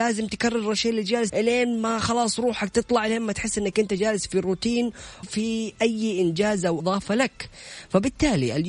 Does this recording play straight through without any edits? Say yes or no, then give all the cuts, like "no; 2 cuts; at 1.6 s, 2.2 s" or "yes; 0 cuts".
no; 3 cuts; at 1.3 s, 5.2 s, 6.8 s